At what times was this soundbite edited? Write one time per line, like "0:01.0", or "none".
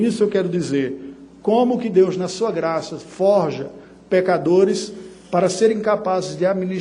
none